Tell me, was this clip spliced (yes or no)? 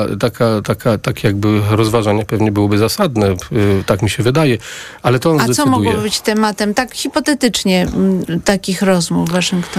no